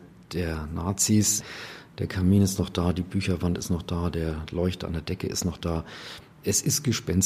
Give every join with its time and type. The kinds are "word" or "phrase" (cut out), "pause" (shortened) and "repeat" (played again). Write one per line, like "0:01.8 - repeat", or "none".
none